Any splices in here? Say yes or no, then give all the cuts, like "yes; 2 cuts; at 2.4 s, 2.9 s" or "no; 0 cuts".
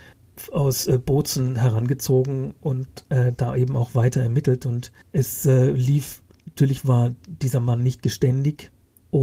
no; 0 cuts